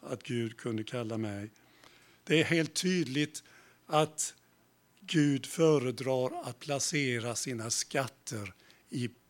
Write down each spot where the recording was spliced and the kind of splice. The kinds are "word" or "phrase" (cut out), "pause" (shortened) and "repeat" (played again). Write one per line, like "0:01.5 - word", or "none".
none